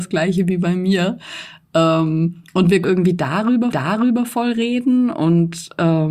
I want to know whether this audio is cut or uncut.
cut